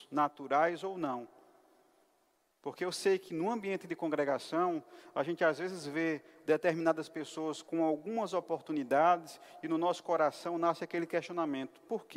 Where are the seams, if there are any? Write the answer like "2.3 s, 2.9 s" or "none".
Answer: none